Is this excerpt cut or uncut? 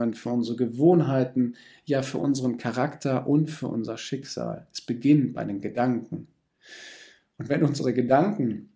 uncut